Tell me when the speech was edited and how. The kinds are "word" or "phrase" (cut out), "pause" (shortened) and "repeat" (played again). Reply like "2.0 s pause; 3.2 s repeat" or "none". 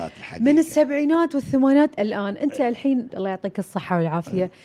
2.0 s word; 3.1 s word